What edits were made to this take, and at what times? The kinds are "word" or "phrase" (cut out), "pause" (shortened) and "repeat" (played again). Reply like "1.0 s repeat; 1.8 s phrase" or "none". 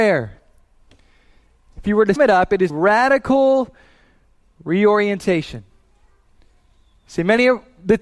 2.2 s word; 2.7 s word